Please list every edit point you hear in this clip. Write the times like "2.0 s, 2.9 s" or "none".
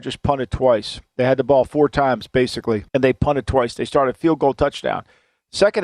2.9 s